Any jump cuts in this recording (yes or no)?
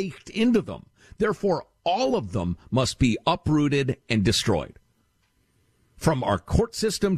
no